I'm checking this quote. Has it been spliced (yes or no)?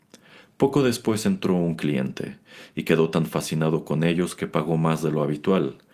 no